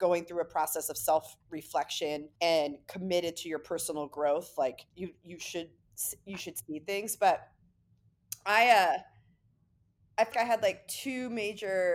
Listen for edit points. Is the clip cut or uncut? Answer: cut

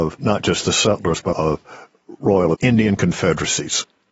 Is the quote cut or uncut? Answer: cut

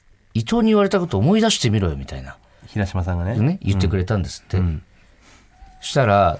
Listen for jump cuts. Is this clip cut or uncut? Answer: uncut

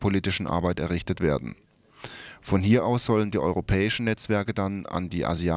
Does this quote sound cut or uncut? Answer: uncut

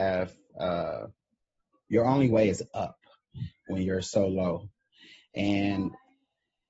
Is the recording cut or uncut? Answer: uncut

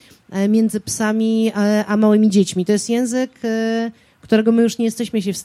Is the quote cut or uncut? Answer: uncut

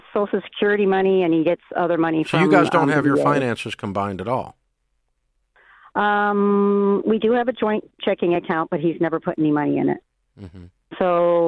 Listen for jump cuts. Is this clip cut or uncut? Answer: uncut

